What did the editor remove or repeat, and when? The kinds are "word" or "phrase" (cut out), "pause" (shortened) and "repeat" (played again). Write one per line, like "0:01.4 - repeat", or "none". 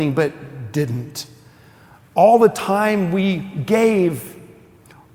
none